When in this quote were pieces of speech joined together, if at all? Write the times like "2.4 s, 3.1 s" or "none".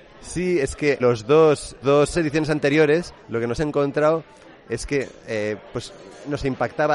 1.0 s, 1.8 s, 2.1 s, 3.2 s, 3.6 s